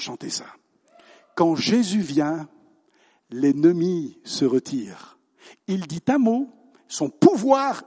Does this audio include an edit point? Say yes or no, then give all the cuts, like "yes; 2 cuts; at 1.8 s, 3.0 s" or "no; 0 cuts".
no; 0 cuts